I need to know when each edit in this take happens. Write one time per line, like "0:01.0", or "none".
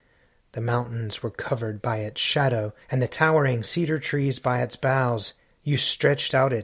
0:02.8
0:05.4